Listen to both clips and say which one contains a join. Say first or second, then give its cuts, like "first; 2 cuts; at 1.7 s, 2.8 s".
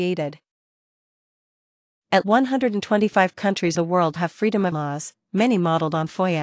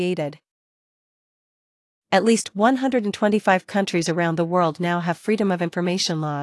first; 4 cuts; at 2.2 s, 3.7 s, 4.2 s, 4.7 s